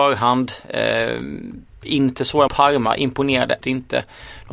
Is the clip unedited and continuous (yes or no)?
no